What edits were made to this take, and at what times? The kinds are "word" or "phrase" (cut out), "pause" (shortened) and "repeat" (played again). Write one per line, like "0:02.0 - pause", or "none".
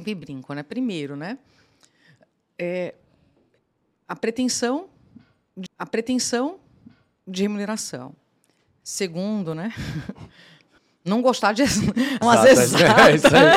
0:05.7 - repeat
0:10.8 - pause
0:12.2 - word